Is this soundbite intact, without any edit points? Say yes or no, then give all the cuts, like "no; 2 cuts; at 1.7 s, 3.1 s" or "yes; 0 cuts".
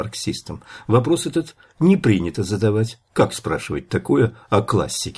yes; 0 cuts